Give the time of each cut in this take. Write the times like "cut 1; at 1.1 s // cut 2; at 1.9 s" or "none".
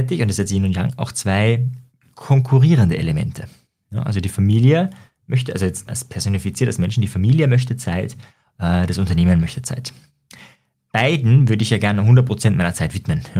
cut 1; at 5.9 s